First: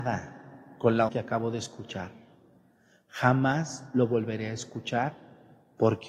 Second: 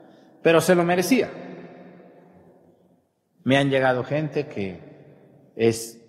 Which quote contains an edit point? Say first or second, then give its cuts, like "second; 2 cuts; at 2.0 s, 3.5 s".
first; 1 cut; at 1.1 s